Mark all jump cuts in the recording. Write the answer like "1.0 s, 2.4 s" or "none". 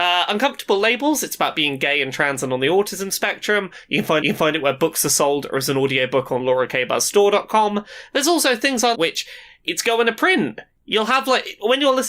4.2 s, 8.9 s